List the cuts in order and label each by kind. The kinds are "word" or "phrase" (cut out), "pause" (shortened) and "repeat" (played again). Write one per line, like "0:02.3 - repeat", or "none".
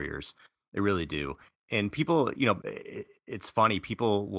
none